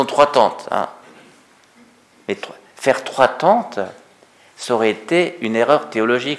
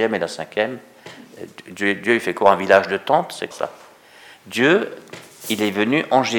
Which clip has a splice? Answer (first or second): second